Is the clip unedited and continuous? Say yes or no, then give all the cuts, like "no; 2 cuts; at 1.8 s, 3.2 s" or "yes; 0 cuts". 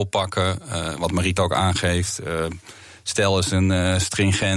no; 1 cut; at 1.4 s